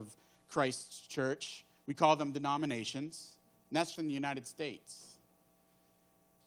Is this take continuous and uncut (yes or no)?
no